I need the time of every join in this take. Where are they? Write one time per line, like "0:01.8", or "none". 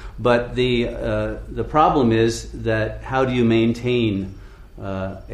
none